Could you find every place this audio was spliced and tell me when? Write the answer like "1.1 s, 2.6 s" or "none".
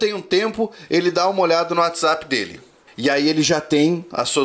2.9 s